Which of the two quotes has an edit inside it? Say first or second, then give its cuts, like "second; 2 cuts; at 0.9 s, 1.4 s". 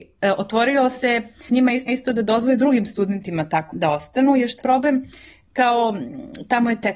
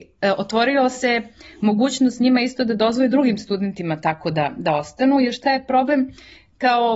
first; 4 cuts; at 1.5 s, 1.9 s, 3.7 s, 4.6 s